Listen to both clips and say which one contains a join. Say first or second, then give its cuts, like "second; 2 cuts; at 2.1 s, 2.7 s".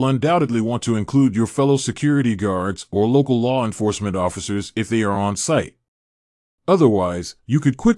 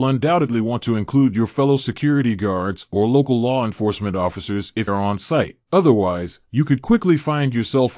second; 2 cuts; at 4.9 s, 5.6 s